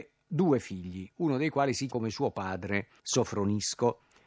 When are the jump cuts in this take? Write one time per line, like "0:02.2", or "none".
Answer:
0:01.9
0:03.0